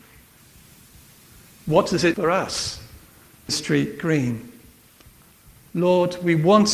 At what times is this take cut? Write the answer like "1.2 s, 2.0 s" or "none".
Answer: 2.1 s, 3.5 s